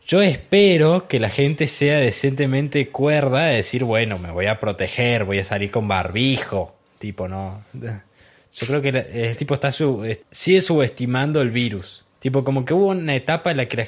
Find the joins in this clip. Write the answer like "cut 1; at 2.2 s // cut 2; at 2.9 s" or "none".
cut 1; at 9.4 s // cut 2; at 10.2 s // cut 3; at 12.1 s